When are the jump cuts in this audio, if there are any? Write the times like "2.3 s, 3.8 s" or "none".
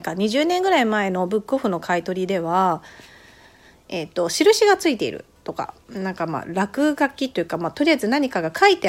none